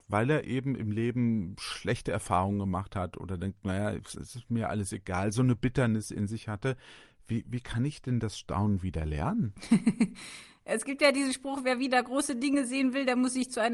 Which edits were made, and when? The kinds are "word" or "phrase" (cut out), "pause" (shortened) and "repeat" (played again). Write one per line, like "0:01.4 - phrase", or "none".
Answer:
none